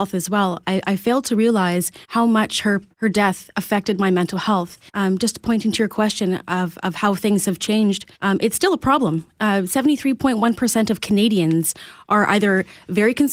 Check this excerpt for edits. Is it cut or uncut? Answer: cut